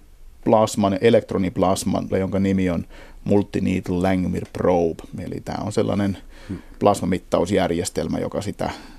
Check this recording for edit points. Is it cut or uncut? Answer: cut